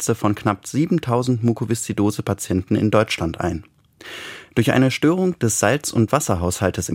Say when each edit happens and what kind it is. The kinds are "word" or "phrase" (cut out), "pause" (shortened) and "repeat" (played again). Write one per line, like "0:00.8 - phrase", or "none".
none